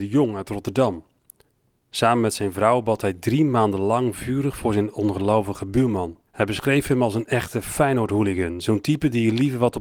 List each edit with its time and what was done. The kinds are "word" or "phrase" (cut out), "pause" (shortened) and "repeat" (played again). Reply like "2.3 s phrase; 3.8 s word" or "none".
6.3 s pause